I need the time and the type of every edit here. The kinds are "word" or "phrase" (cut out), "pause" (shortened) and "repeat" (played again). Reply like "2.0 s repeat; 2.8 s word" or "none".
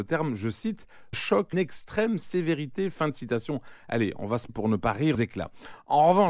1.1 s word; 1.5 s word; 4.5 s word; 5.1 s word